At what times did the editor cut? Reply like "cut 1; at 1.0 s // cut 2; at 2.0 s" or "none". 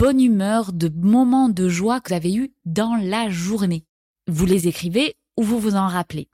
cut 1; at 2.1 s